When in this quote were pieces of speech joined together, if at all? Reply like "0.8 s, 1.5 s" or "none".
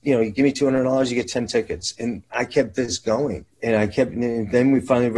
3.5 s